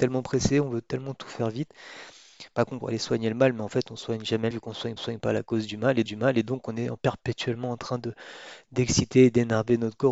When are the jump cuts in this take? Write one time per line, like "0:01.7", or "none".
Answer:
0:02.8
0:04.5
0:05.0
0:06.1

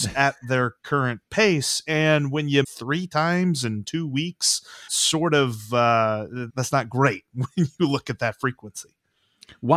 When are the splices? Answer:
0:02.6
0:04.9
0:06.5

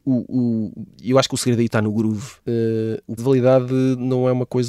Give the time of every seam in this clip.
0:02.4
0:03.2

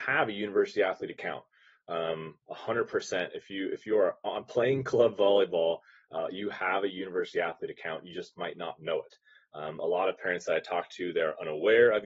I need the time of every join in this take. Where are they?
none

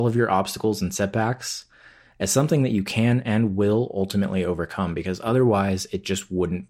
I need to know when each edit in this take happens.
none

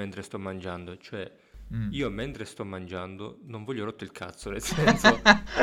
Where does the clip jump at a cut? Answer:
none

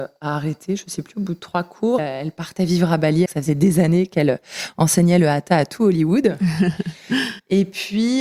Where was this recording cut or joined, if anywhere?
0:02.0
0:03.3

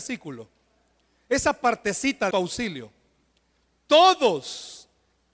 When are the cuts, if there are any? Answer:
0:02.3

